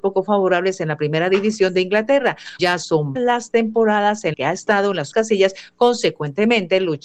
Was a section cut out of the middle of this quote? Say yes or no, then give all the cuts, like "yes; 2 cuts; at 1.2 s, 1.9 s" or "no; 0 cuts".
yes; 4 cuts; at 2.6 s, 3.2 s, 4.3 s, 5.1 s